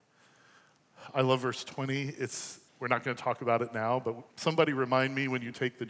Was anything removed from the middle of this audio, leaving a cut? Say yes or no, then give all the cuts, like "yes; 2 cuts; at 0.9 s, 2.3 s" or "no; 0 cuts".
yes; 2 cuts; at 2.7 s, 4.3 s